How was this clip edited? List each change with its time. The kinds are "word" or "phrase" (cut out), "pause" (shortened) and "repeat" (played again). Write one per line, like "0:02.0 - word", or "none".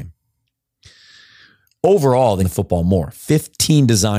0:02.4 - phrase